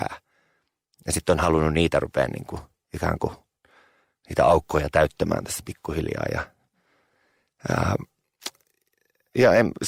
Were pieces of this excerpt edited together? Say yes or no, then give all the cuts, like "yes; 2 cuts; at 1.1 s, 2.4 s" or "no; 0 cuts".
no; 0 cuts